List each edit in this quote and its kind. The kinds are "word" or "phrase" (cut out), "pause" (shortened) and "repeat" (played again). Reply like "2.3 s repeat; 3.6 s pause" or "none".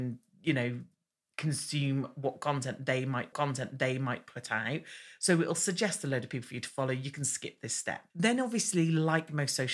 3.3 s repeat; 8.1 s pause